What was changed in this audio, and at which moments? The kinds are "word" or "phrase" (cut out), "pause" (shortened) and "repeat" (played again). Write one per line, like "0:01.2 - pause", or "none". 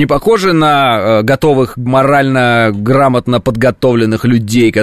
0:01.9 - word